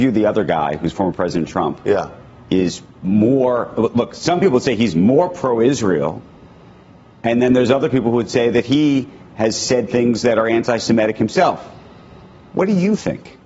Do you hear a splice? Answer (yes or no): no